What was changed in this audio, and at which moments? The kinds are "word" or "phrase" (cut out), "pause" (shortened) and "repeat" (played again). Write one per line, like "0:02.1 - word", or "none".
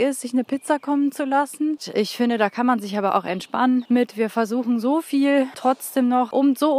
none